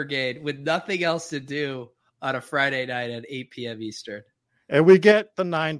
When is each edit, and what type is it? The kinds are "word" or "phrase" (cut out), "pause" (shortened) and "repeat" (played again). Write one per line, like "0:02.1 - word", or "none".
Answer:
none